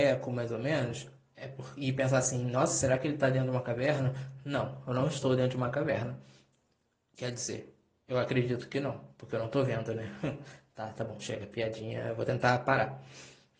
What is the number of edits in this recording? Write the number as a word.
zero